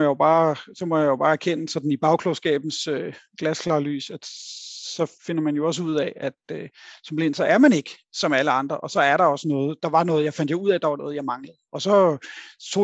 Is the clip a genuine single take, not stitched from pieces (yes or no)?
no